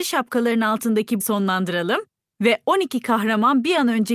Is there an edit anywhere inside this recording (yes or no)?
yes